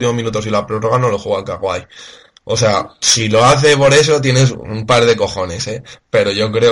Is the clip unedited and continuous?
yes; 0 cuts

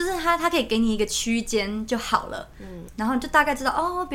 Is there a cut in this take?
no; 0 cuts

